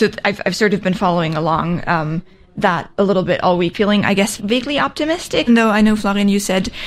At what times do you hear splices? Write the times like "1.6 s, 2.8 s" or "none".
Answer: 3.7 s, 4.4 s, 5.5 s